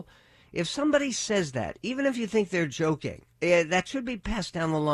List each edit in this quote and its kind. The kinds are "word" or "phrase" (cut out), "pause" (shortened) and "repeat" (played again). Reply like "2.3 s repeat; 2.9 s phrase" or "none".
3.3 s pause